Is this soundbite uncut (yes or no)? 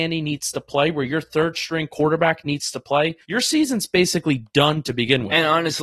no